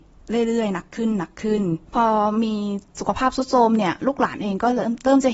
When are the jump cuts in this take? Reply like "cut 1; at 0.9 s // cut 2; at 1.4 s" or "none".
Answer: cut 1; at 1.8 s